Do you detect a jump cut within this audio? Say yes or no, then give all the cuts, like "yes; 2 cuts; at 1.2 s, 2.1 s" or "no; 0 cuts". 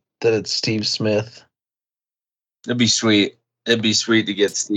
no; 0 cuts